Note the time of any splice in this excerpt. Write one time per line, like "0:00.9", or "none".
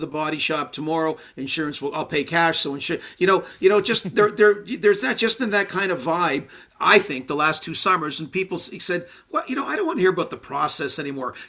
none